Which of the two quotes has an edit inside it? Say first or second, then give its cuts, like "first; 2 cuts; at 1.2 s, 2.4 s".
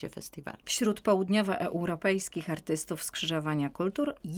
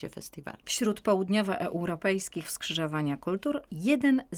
second; 1 cut; at 2.4 s